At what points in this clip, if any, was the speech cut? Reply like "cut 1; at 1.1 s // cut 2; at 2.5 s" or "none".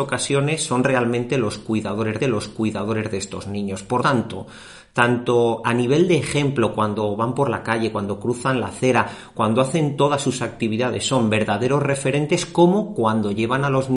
cut 1; at 2.2 s // cut 2; at 4.0 s